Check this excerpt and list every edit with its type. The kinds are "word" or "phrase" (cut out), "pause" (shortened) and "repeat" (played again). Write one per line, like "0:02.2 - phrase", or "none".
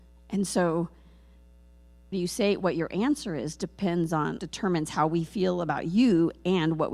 0:02.1 - word
0:04.4 - word